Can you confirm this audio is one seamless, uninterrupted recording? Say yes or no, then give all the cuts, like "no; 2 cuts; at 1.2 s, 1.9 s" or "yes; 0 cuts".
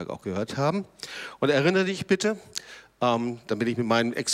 yes; 0 cuts